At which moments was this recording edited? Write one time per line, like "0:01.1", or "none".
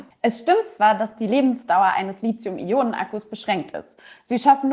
none

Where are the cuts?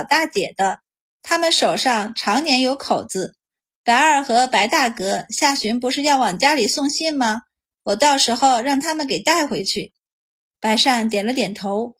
none

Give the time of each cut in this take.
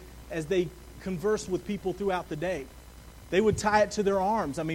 none

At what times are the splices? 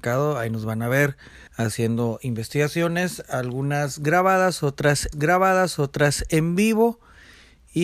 0:01.5
0:05.1

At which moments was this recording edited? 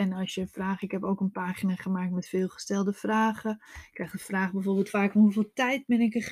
0:04.9

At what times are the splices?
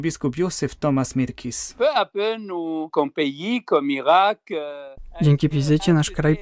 0:05.5

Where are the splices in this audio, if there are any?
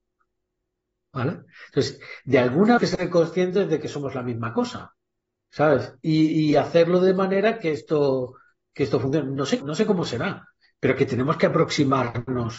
0:02.8
0:05.3
0:09.6

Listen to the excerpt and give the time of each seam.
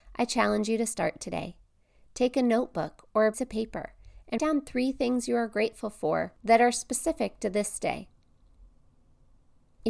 0:03.3
0:04.4

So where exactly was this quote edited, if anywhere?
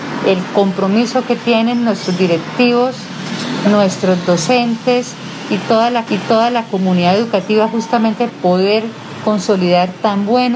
0:06.1
0:08.3

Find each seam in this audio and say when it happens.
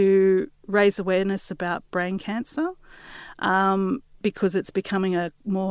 none

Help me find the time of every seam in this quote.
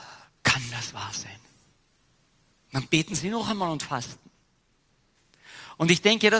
none

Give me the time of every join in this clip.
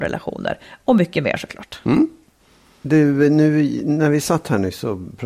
none

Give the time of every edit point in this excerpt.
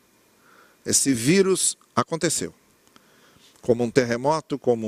none

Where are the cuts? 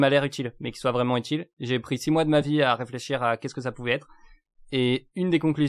none

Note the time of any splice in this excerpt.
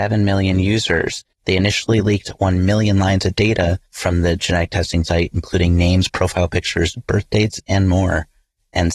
0:01.3
0:03.9

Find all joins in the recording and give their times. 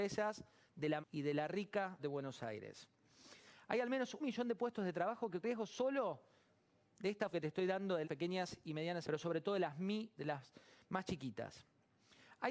0:01.0
0:02.0
0:04.2
0:05.4
0:07.3
0:08.0
0:09.0
0:10.2

